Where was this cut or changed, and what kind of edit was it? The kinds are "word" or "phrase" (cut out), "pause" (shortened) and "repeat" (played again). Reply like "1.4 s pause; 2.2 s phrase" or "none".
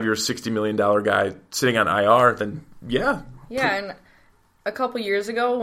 none

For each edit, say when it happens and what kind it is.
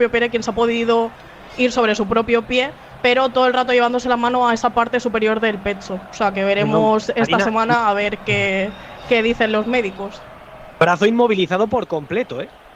none

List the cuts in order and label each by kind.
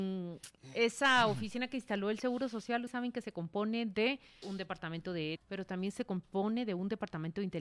2.9 s word; 4.4 s word; 5.4 s word

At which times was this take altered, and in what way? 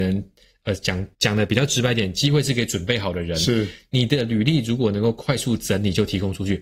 1.1 s pause

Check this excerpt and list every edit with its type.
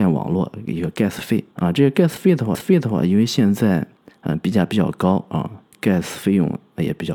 1.5 s pause; 2.5 s repeat; 4.0 s pause; 5.7 s pause

